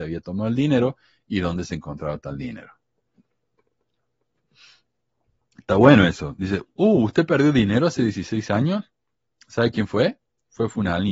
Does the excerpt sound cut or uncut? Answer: uncut